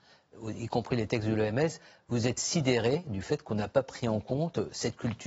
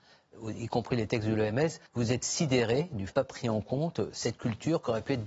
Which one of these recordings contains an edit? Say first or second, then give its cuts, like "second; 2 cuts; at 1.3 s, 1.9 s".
second; 2 cuts; at 1.9 s, 3.1 s